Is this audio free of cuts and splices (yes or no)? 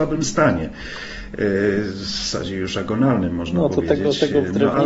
yes